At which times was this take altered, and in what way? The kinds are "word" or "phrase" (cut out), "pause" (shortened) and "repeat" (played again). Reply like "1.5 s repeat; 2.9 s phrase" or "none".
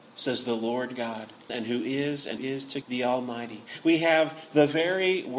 1.5 s phrase; 2.4 s word; 2.8 s word